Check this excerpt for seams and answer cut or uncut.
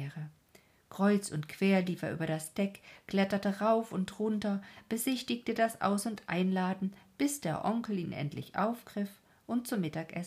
uncut